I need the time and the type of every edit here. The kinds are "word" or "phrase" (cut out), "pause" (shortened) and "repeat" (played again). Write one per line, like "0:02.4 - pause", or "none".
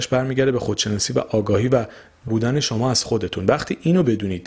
0:02.3 - word